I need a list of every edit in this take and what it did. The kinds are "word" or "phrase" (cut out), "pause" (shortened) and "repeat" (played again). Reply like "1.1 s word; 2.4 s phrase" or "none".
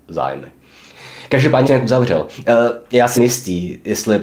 1.6 s word; 3.2 s word